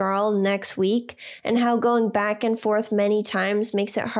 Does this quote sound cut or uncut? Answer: uncut